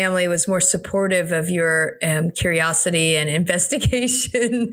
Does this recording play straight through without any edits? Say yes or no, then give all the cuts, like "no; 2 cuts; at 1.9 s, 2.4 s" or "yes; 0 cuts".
yes; 0 cuts